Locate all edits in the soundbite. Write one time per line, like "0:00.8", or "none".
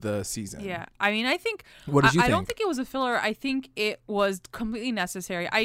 none